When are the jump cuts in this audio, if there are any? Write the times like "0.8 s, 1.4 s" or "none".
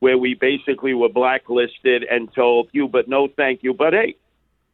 2.7 s